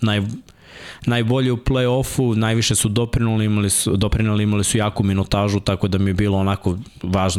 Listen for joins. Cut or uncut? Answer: uncut